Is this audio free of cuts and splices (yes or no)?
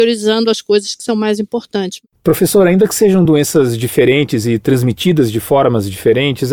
yes